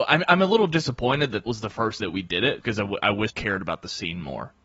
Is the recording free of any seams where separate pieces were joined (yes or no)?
no